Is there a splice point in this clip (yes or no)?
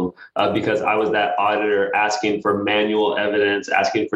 no